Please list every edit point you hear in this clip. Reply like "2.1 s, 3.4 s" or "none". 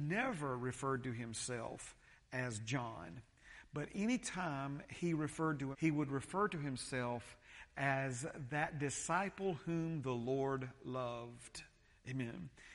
5.7 s